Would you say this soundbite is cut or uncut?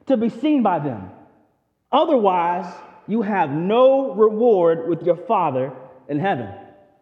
uncut